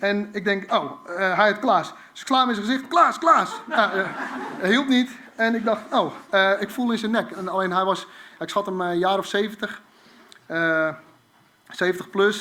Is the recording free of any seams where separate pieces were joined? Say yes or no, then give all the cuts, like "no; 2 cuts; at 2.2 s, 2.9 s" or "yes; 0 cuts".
yes; 0 cuts